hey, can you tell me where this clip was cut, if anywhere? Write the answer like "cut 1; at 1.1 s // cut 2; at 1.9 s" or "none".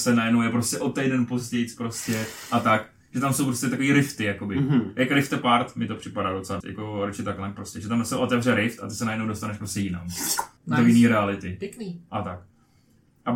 cut 1; at 6.6 s // cut 2; at 10.6 s